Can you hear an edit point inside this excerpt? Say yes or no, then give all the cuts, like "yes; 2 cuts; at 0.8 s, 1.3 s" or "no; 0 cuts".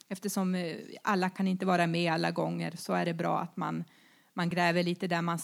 no; 0 cuts